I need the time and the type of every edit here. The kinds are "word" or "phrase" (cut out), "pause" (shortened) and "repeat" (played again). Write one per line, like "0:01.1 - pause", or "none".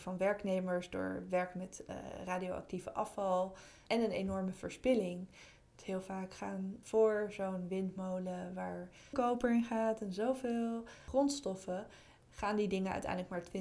0:09.1 - word